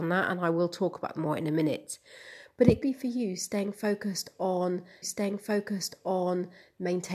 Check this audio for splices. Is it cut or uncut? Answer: cut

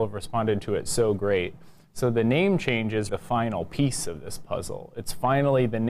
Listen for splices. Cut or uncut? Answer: cut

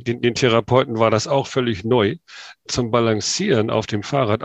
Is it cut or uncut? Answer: cut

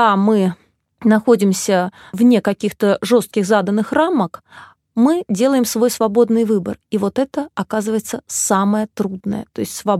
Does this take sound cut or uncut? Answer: uncut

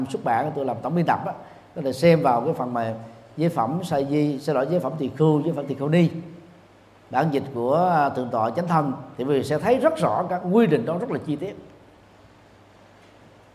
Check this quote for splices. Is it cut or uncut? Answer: uncut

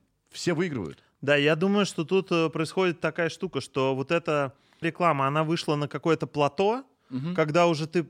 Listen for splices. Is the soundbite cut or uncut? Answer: cut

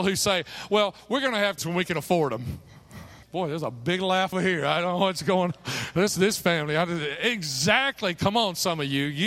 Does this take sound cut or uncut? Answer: cut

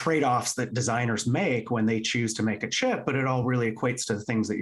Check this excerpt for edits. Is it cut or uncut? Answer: uncut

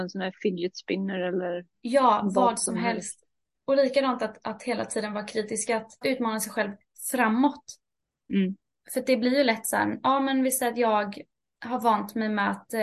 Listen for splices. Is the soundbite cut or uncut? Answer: uncut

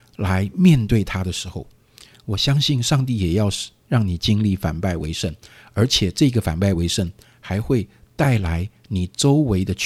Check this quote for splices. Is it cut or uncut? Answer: uncut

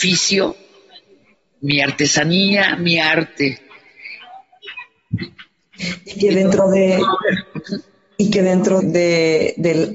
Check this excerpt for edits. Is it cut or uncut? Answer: cut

